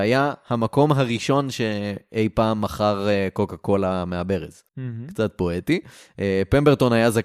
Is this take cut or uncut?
cut